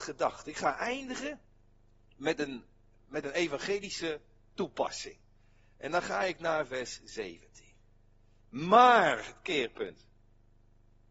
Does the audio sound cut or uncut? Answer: uncut